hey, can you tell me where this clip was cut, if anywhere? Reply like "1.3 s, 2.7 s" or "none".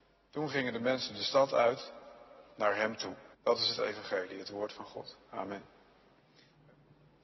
2.5 s, 3.3 s, 5.2 s

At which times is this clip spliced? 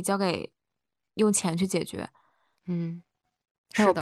none

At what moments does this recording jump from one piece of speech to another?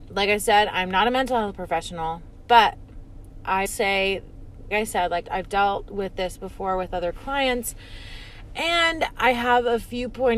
3.7 s, 4.7 s, 5.2 s

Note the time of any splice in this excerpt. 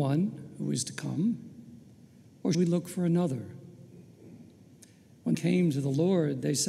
2.5 s, 5.3 s

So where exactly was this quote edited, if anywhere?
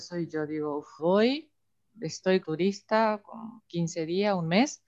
1.0 s, 2.4 s, 3.6 s

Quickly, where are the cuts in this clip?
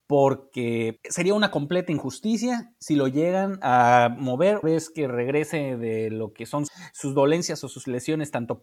4.6 s

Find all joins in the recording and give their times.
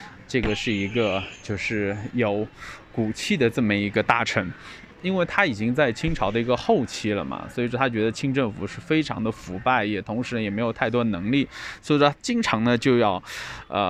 4.9 s

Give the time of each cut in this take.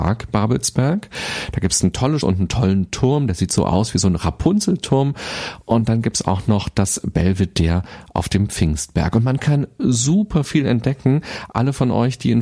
2.2 s

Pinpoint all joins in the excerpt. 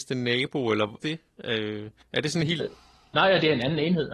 1.0 s, 2.0 s, 2.6 s

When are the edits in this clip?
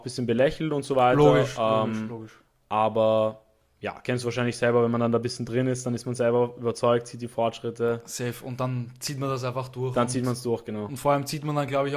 none

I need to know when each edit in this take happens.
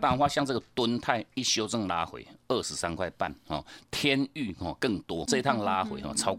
5.3 s

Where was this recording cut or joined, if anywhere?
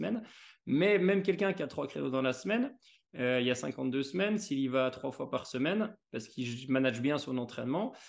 none

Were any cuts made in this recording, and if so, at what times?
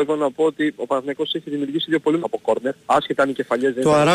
2.2 s, 2.8 s

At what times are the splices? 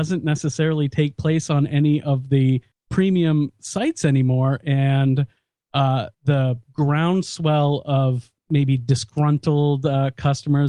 2.7 s, 6.1 s, 8.4 s

